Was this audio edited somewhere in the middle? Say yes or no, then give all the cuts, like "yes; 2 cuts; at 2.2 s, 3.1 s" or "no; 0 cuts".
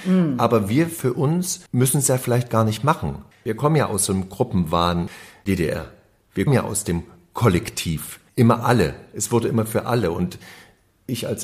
yes; 3 cuts; at 1.7 s, 6.5 s, 8.3 s